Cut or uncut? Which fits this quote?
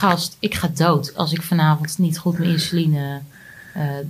uncut